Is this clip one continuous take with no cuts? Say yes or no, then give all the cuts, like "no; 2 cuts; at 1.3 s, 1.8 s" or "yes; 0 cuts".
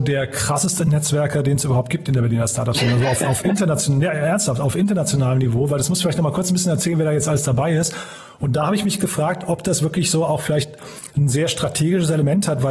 yes; 0 cuts